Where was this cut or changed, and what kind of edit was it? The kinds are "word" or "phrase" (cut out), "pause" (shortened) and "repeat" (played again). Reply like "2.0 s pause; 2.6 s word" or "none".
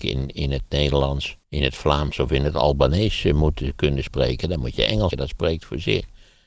1.4 s pause; 5.1 s word